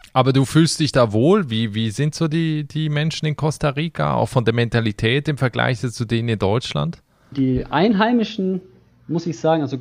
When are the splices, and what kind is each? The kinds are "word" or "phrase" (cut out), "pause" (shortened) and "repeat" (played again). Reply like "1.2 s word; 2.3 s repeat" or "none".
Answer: none